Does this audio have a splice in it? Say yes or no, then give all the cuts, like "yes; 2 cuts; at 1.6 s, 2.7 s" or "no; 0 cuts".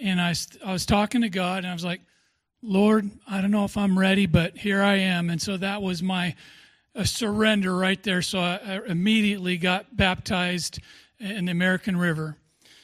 no; 0 cuts